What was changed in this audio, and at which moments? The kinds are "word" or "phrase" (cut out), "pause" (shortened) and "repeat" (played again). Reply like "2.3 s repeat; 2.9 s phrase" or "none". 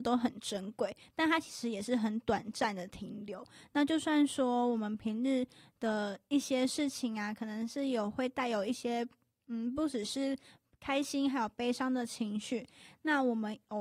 none

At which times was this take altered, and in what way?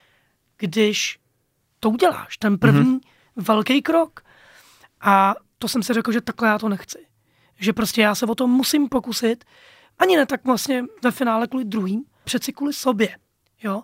12.2 s word

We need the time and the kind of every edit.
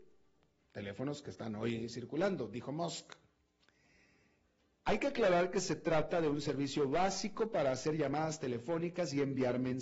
none

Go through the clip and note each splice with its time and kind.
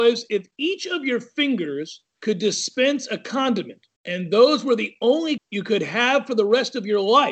2.1 s pause; 4.0 s pause; 5.4 s word

